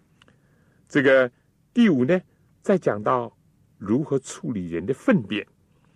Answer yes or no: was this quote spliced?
no